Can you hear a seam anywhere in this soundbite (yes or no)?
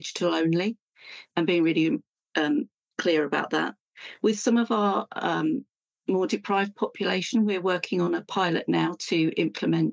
no